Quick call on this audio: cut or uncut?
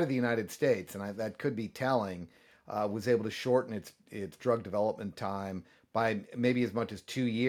uncut